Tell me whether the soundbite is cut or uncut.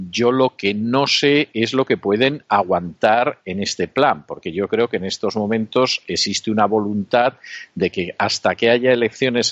uncut